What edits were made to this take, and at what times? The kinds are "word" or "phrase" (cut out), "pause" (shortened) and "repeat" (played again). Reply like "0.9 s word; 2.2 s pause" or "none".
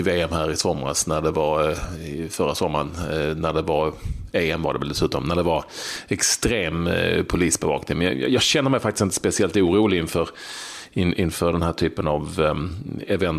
none